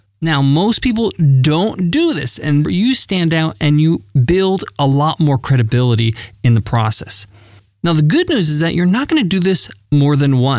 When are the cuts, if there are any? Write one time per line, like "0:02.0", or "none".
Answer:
0:02.6
0:08.5